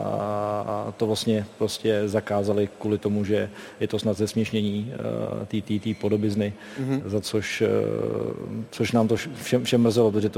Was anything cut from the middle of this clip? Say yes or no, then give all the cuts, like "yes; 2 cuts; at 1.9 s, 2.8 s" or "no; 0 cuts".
no; 0 cuts